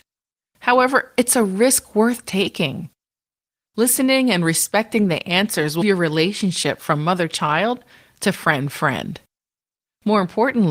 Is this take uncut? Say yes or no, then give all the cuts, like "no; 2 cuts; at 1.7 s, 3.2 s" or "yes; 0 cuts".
no; 1 cut; at 5.8 s